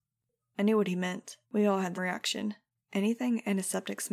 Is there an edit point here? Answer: yes; 3 cuts; at 1.4 s, 2.0 s, 2.8 s

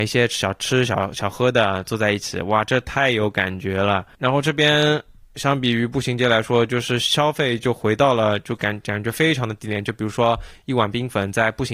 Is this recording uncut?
yes; 0 cuts

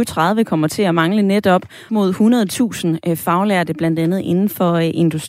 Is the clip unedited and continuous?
no; 1 cut; at 1.9 s

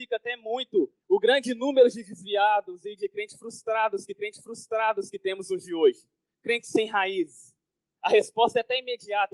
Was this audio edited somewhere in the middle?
yes; 4 cuts; at 1.0 s, 4.1 s, 5.6 s, 6.3 s

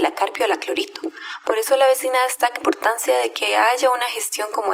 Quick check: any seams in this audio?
yes; 1 cut; at 2.6 s

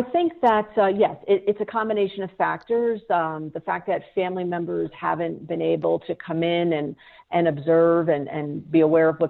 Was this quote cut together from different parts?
no; 0 cuts

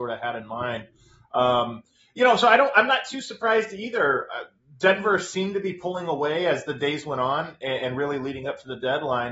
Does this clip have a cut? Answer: no; 0 cuts

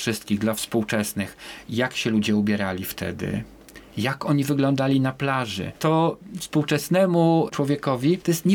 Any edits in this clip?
no; 0 cuts

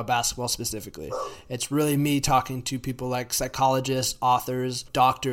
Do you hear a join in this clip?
no; 0 cuts

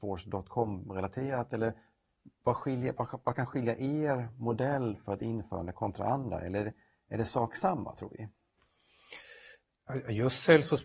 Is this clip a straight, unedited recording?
yes; 0 cuts

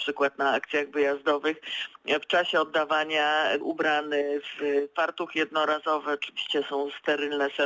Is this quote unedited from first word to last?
no; 1 cut; at 3.6 s

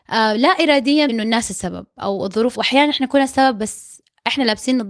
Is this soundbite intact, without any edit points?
no; 2 cuts; at 1.1 s, 2.5 s

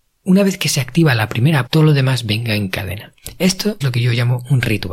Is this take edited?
yes; 2 cuts; at 1.7 s, 3.8 s

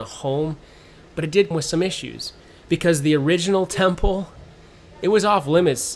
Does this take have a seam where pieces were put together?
yes; 1 cut; at 1.5 s

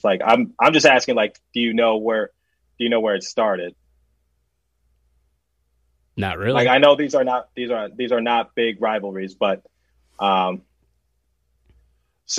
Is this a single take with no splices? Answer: yes; 0 cuts

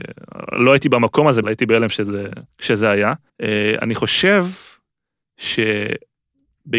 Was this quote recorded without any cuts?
no; 3 cuts; at 1.4 s, 2.5 s, 3.3 s

